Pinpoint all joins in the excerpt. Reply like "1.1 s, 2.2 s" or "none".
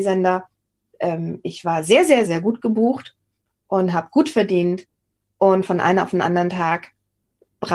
2.3 s